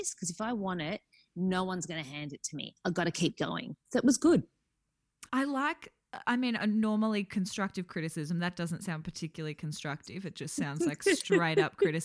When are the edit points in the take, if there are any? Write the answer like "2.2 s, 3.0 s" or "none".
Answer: 5.3 s